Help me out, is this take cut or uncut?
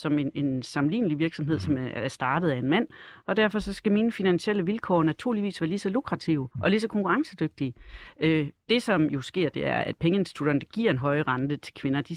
cut